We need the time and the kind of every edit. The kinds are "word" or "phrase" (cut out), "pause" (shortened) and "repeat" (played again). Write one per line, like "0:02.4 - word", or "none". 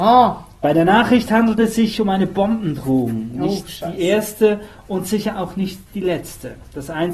none